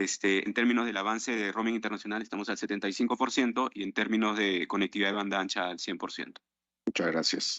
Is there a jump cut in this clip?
no; 0 cuts

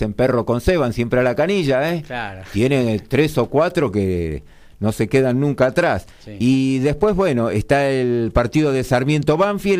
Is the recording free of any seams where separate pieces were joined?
yes; 0 cuts

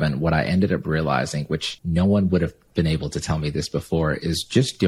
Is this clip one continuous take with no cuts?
yes; 0 cuts

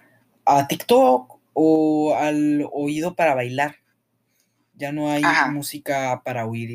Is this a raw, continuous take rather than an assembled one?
yes; 0 cuts

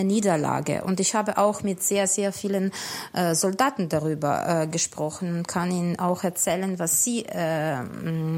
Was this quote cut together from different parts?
no; 0 cuts

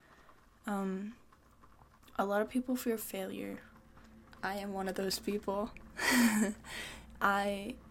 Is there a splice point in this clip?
no; 0 cuts

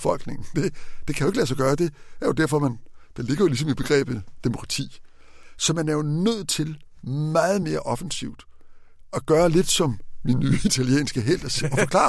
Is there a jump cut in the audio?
no; 0 cuts

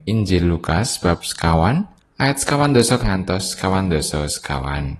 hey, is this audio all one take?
no; 2 cuts; at 2.0 s, 3.0 s

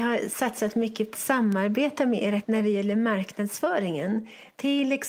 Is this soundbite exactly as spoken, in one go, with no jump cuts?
no; 2 cuts; at 1.1 s, 2.4 s

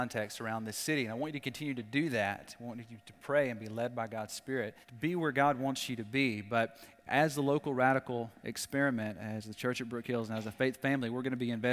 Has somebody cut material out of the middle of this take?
yes; 1 cut; at 4.8 s

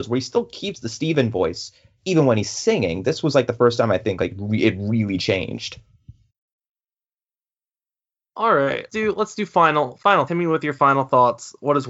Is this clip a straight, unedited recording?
no; 2 cuts; at 8.9 s, 10.3 s

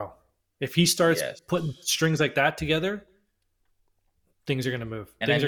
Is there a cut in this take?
no; 0 cuts

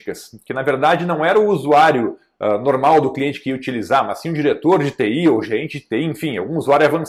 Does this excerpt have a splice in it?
no; 0 cuts

